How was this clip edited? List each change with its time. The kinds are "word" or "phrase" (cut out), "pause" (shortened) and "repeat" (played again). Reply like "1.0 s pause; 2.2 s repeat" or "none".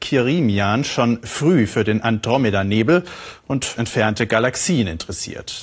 3.8 s word